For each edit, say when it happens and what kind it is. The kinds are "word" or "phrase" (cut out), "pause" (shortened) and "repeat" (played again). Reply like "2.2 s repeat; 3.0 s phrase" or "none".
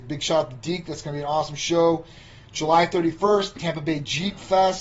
none